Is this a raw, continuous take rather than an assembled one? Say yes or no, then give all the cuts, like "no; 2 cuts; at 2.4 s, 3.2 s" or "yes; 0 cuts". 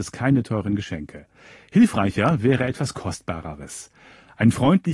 yes; 0 cuts